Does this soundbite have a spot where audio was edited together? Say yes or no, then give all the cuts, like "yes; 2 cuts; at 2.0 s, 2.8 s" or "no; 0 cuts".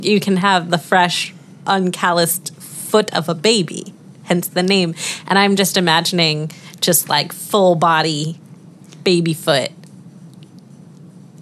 no; 0 cuts